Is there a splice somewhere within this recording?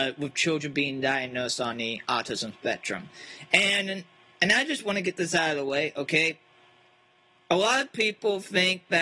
no; 0 cuts

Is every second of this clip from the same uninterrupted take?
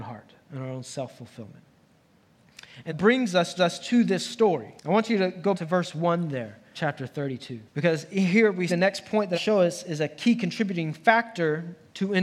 no; 8 cuts; at 2.9 s, 3.6 s, 4.8 s, 5.5 s, 6.7 s, 7.7 s, 8.7 s, 9.3 s

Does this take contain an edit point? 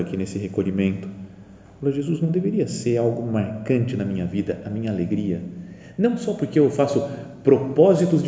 no; 0 cuts

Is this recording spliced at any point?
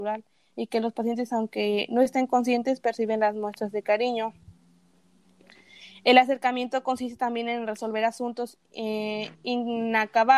no; 0 cuts

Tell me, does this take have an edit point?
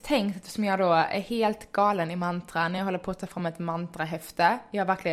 no; 0 cuts

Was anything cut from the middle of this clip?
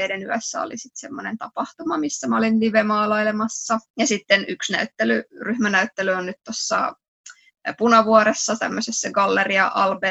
yes; 1 cut; at 3.9 s

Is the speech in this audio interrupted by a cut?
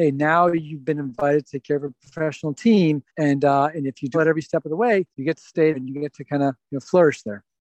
yes; 4 cuts; at 3.1 s, 4.1 s, 5.1 s, 5.7 s

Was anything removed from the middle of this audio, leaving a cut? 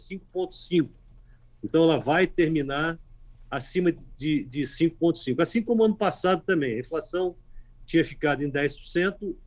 no; 0 cuts

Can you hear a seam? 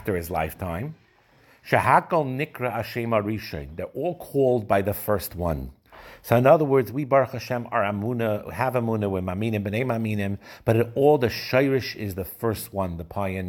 no; 0 cuts

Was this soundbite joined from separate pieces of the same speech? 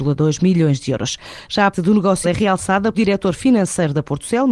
yes; 3 cuts; at 1.7 s, 2.2 s, 2.9 s

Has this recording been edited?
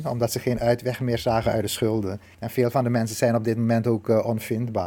no; 0 cuts

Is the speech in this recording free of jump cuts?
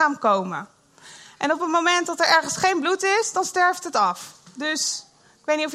yes; 0 cuts

